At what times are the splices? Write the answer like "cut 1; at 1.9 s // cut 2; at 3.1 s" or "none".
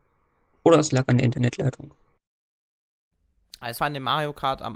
cut 1; at 3.8 s